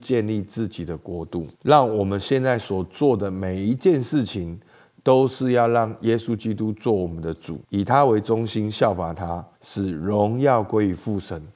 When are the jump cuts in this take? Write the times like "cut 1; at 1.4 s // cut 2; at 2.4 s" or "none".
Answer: cut 1; at 1.6 s // cut 2; at 7.6 s // cut 3; at 9.5 s